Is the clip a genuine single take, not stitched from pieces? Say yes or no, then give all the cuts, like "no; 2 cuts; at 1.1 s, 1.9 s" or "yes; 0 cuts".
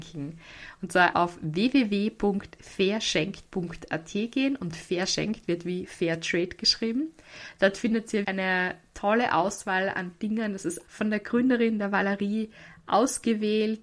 no; 3 cuts; at 1.1 s, 8.2 s, 10.9 s